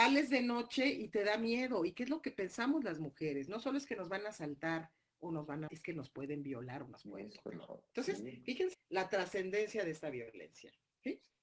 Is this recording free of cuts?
no; 2 cuts; at 5.7 s, 8.7 s

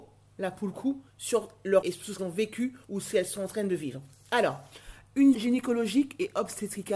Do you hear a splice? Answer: yes; 5 cuts; at 1.1 s, 1.8 s, 2.2 s, 2.8 s, 5.3 s

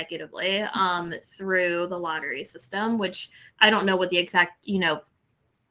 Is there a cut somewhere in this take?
no; 0 cuts

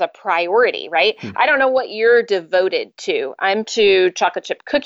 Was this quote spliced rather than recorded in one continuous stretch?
yes; 1 cut; at 3.6 s

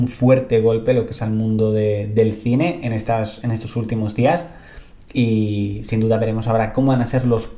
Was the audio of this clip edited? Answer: no; 0 cuts

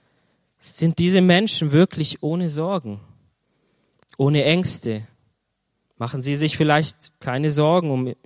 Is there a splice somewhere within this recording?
no; 0 cuts

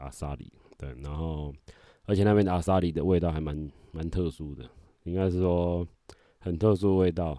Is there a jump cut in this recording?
no; 0 cuts

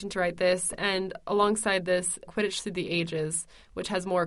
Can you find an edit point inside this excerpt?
yes; 1 cut; at 2.3 s

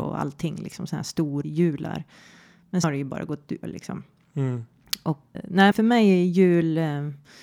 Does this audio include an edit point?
yes; 5 cuts; at 1.4 s, 2.8 s, 3.6 s, 5.3 s, 5.7 s

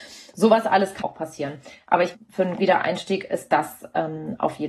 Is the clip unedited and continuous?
no; 3 cuts; at 1.0 s, 2.1 s, 2.6 s

